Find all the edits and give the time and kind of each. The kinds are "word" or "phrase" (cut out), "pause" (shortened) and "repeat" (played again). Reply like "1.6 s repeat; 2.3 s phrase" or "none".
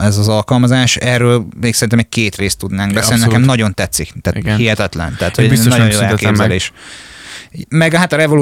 none

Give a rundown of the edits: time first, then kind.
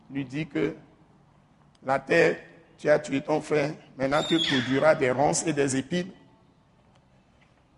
none

